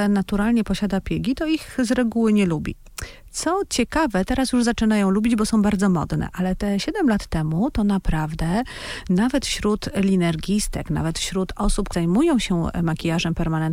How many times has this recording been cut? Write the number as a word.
one